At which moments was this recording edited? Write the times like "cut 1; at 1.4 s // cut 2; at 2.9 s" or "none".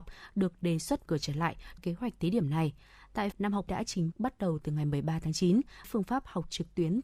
cut 1; at 1.1 s // cut 2; at 1.8 s // cut 3; at 3.3 s // cut 4; at 3.7 s // cut 5; at 4.1 s // cut 6; at 5.8 s